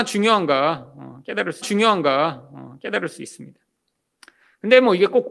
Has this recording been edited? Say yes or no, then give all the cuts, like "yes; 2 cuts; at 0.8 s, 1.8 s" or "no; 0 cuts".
yes; 1 cut; at 1.6 s